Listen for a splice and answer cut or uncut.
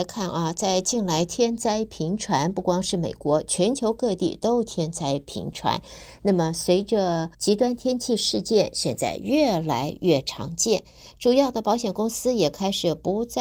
cut